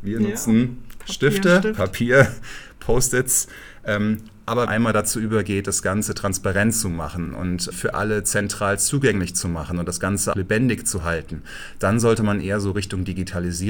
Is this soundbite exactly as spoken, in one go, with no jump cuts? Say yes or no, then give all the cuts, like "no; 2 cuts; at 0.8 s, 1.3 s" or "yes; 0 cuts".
no; 3 cuts; at 4.7 s, 7.7 s, 10.3 s